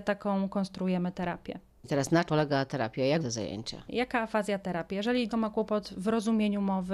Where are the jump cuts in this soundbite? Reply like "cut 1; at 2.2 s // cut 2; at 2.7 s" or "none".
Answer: cut 1; at 2.3 s // cut 2; at 2.7 s // cut 3; at 3.2 s // cut 4; at 4.6 s // cut 5; at 5.3 s